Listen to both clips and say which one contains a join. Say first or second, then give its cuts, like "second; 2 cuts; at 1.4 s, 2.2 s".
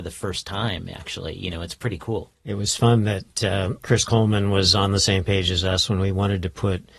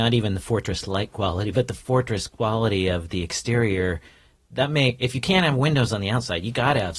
first; 1 cut; at 2.4 s